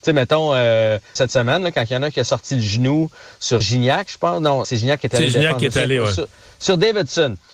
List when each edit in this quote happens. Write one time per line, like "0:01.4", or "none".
0:01.2
0:03.6
0:04.6